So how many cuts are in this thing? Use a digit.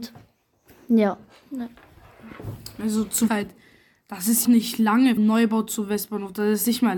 3